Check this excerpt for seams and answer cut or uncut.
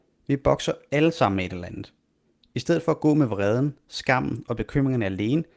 uncut